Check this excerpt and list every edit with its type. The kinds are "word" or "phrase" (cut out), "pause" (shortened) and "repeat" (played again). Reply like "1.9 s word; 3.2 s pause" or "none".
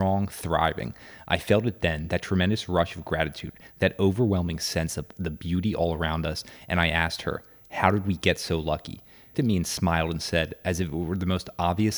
9.3 s phrase